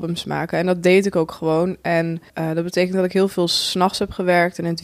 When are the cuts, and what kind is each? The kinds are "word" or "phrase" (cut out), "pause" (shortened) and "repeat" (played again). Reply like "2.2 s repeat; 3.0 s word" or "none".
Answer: 2.3 s pause